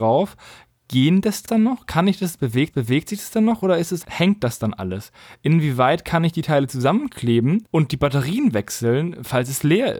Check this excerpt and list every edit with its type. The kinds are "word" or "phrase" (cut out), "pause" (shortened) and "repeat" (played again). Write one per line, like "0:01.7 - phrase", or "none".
0:01.5 - phrase
0:02.7 - repeat
0:04.0 - word